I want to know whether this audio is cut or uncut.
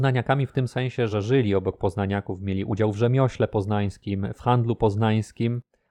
cut